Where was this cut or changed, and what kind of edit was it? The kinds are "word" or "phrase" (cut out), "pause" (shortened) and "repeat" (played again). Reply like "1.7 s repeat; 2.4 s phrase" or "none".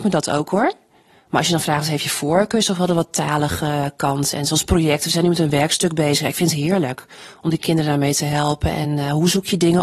none